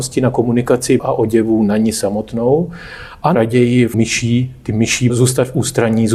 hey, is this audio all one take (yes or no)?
no